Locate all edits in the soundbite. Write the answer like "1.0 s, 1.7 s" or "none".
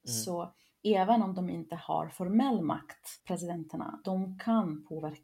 3.2 s